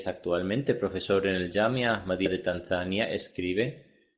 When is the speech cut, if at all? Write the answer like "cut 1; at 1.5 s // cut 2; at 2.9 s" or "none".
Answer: none